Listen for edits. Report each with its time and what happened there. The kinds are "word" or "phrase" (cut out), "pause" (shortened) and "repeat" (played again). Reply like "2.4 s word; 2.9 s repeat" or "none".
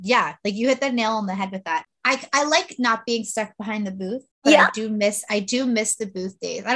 1.9 s pause; 4.3 s pause